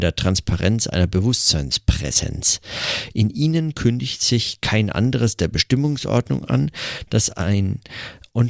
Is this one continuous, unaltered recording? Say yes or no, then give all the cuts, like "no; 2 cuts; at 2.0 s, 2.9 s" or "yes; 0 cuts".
yes; 0 cuts